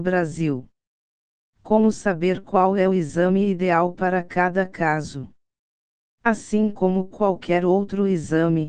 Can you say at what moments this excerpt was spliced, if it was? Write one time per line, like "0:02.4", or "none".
none